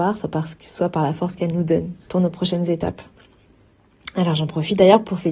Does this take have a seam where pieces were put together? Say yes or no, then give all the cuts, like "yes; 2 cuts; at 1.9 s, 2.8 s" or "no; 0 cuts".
no; 0 cuts